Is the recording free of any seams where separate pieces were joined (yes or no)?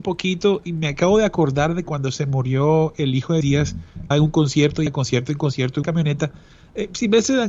no